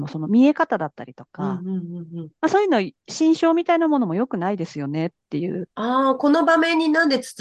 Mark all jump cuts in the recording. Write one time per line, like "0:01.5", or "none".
0:05.7